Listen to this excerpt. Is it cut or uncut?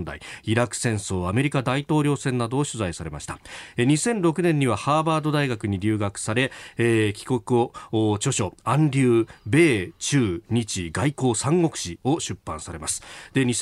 uncut